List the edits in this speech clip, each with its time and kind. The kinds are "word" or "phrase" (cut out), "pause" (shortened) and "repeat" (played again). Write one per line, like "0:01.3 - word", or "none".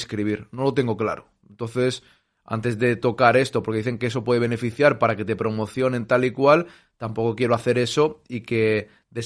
none

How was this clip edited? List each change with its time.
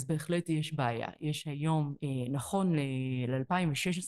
none

